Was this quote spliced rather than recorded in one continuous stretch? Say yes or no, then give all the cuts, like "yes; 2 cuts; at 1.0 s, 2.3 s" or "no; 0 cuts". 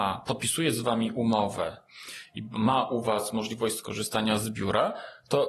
no; 0 cuts